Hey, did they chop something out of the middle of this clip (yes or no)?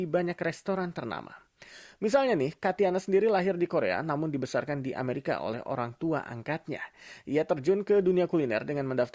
no